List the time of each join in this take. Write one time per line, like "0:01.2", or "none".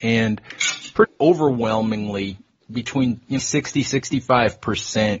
0:01.0
0:03.4